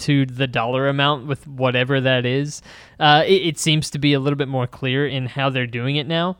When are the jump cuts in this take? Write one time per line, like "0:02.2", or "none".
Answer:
none